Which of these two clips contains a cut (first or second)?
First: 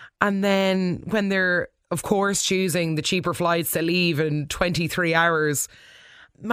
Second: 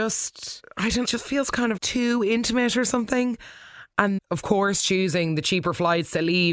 second